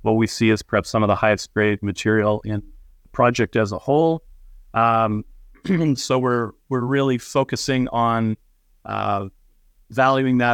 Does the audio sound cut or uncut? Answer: uncut